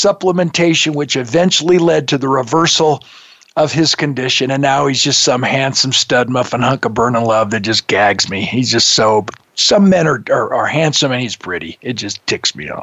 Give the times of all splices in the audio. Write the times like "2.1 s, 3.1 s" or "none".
none